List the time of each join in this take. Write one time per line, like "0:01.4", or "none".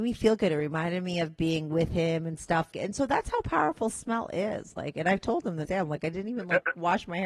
0:02.7
0:05.7